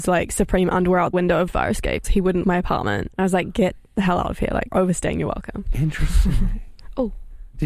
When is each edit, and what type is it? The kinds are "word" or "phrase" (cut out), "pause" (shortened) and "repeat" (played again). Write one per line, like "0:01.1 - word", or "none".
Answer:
0:01.1 - word
0:01.5 - word
0:02.0 - word
0:02.4 - word
0:03.1 - word
0:04.7 - word